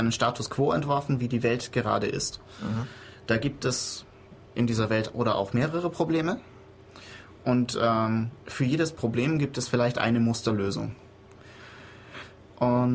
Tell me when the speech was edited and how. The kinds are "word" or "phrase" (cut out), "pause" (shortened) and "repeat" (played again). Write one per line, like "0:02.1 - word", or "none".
0:05.1 - phrase
0:08.4 - pause